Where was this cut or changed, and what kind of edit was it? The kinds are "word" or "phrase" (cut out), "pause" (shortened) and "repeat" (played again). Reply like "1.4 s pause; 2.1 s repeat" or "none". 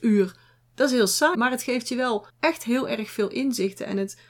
1.3 s word; 2.3 s pause